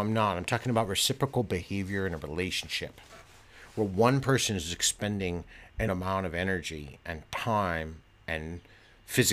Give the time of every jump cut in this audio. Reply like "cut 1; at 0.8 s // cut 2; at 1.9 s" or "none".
cut 1; at 5.9 s